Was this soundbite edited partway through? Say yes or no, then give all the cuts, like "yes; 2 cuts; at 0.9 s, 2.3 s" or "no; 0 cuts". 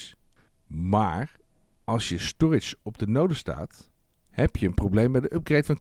no; 0 cuts